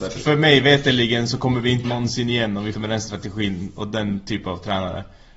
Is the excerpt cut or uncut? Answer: cut